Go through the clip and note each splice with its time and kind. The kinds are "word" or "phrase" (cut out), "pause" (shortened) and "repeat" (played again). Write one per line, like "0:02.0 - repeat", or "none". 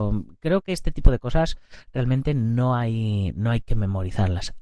none